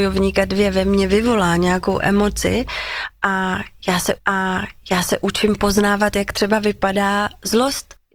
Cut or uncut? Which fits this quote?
cut